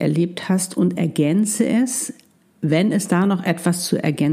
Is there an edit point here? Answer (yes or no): no